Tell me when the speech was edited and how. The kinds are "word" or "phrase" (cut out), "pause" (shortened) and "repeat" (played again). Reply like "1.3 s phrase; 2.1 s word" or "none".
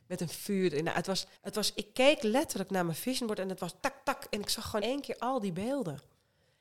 1.4 s pause; 3.8 s word; 4.8 s word